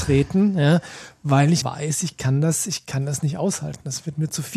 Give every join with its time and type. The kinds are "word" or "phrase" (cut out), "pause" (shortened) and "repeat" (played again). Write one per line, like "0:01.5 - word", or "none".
0:01.6 - word

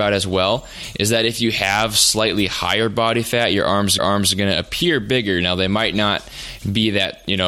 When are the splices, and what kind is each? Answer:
0:04.0 - repeat

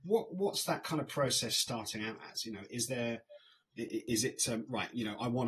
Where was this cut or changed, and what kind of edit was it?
none

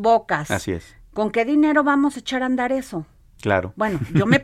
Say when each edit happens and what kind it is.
none

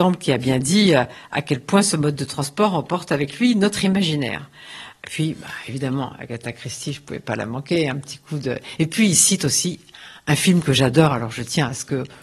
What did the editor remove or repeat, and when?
none

